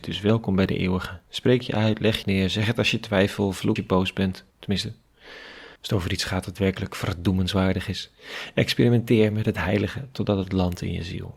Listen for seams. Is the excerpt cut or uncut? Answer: cut